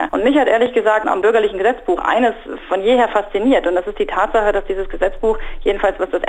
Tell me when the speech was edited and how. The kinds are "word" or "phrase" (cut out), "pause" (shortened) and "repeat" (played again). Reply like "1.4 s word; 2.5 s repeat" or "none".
1.0 s word